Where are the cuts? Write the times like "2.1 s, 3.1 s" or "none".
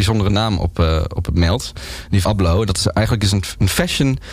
2.2 s